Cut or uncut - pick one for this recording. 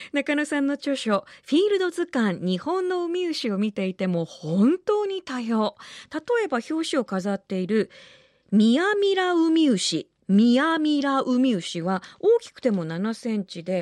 uncut